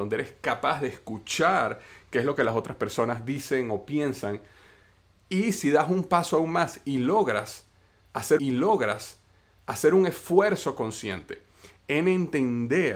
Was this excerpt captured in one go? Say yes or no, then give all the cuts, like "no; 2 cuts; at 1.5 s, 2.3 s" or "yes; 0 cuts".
no; 1 cut; at 8.4 s